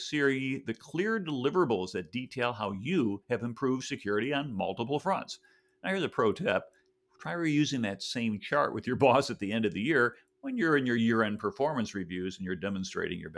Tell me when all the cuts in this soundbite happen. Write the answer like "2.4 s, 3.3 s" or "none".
none